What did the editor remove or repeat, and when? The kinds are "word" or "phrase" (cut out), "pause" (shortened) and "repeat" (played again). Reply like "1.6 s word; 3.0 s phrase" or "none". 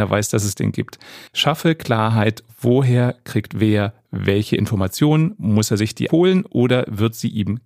1.3 s pause; 6.1 s word